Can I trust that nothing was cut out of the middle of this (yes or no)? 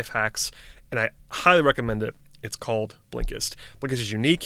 yes